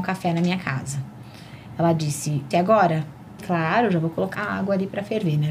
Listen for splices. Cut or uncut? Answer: cut